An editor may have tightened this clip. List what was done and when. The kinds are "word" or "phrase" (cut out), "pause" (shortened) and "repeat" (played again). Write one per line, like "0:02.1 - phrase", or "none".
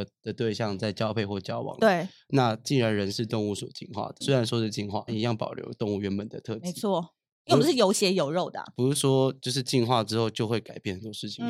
0:04.2 - word
0:05.1 - word